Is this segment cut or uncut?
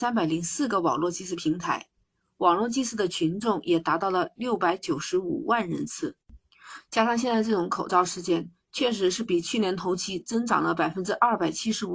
uncut